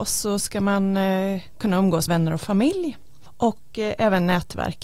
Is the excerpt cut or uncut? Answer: cut